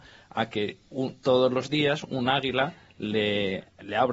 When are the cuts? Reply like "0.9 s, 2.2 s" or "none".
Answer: none